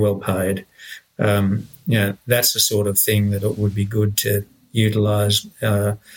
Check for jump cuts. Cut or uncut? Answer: uncut